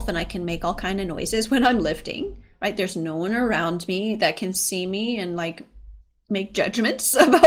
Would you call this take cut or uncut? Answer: uncut